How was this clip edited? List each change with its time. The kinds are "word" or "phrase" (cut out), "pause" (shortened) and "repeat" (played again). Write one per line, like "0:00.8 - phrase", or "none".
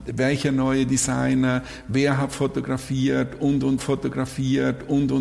0:03.8 - repeat